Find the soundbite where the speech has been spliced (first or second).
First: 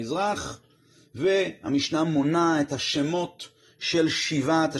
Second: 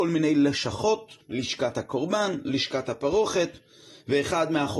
second